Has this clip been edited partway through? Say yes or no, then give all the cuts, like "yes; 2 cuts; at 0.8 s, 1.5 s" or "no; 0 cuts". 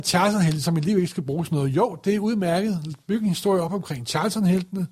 no; 0 cuts